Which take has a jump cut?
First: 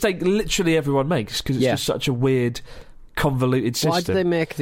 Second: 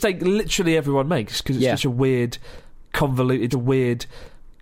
second; 2 cuts; at 1.8 s, 3.5 s

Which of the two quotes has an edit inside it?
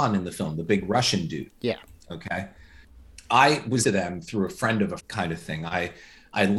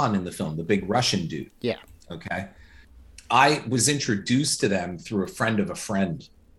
first; 2 cuts; at 3.8 s, 5.0 s

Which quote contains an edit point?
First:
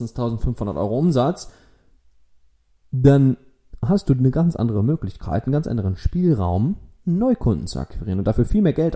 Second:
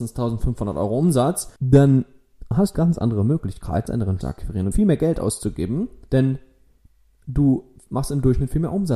second; 6 cuts; at 1.6 s, 2.7 s, 3.9 s, 4.2 s, 4.7 s, 6.1 s

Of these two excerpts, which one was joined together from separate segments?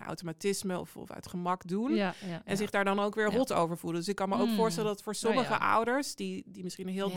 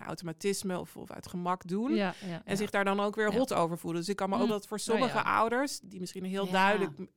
second; 2 cuts; at 4.5 s, 5.8 s

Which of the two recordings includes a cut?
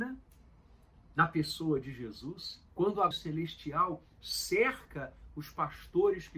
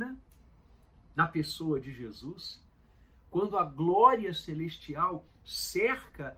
first; 2 cuts; at 2.7 s, 3.1 s

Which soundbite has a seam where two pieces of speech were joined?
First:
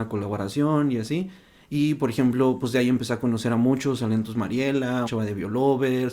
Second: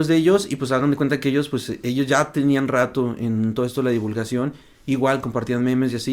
first; 1 cut; at 5.1 s

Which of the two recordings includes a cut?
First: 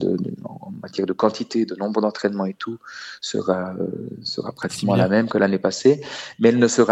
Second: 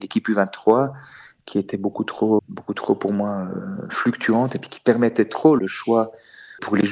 second; 2 cuts; at 2.4 s, 5.6 s

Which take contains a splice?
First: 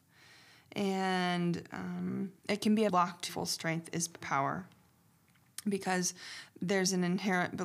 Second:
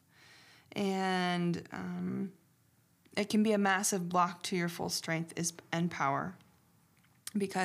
first; 4 cuts; at 2.4 s, 2.9 s, 3.3 s, 4.2 s

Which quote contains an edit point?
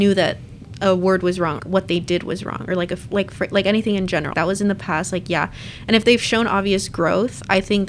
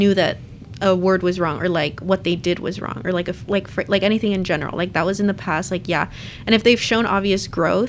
first; 2 cuts; at 1.6 s, 4.3 s

